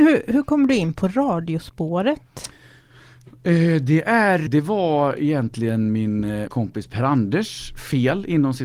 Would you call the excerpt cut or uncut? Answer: cut